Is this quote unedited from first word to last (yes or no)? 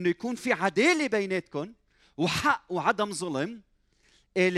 yes